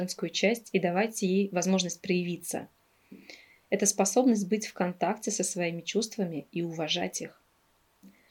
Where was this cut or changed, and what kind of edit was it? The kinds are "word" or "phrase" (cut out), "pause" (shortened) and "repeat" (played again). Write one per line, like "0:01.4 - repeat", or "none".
none